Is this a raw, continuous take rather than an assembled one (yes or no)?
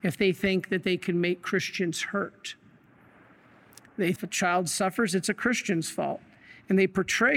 no